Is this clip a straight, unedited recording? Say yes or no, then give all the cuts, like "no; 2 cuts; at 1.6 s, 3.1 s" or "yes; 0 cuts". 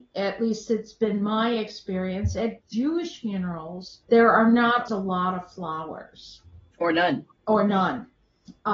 no; 3 cuts; at 4.0 s, 4.9 s, 7.4 s